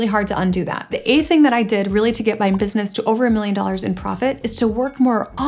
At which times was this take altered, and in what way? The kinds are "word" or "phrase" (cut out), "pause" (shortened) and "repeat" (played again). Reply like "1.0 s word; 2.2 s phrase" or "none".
none